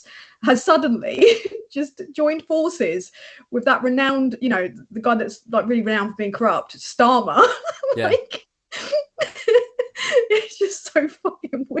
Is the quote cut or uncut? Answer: uncut